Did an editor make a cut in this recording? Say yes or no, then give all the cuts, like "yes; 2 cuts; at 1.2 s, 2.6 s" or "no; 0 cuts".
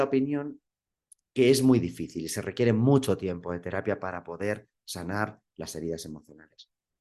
no; 0 cuts